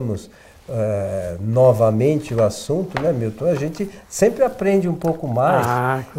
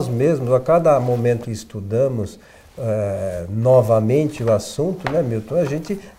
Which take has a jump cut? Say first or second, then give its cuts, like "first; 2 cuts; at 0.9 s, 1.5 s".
second; 1 cut; at 1.4 s